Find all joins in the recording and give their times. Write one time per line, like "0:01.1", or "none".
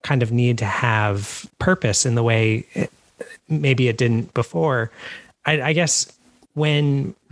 0:01.5